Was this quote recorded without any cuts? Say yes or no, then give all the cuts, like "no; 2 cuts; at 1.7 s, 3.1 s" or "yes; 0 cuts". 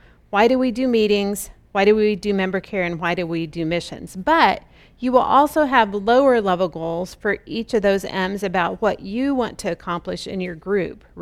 yes; 0 cuts